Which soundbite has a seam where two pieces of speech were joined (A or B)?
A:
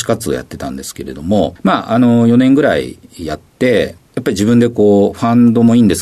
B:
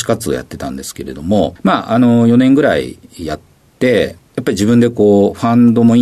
A